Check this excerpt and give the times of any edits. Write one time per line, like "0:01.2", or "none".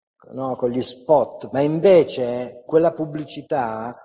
0:01.5
0:02.7